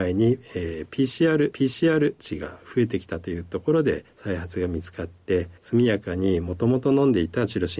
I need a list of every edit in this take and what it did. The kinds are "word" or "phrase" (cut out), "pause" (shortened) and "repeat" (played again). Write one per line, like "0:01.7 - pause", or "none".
0:01.5 - repeat
0:05.6 - pause